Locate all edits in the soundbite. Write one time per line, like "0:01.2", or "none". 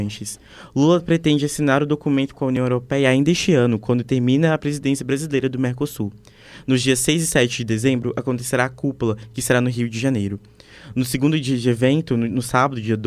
none